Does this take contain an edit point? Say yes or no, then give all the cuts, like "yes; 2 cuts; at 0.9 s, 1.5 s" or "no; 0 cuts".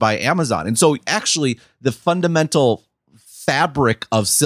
no; 0 cuts